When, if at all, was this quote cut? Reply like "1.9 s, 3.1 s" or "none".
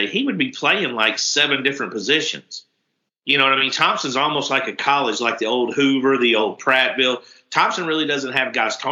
none